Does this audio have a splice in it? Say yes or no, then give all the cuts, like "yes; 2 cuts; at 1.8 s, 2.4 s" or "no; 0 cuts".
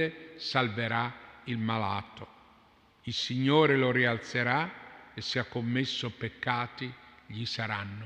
no; 0 cuts